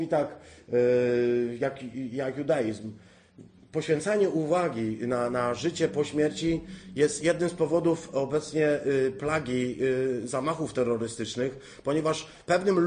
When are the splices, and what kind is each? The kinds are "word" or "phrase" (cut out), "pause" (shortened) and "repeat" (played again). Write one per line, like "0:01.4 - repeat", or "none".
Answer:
0:03.6 - pause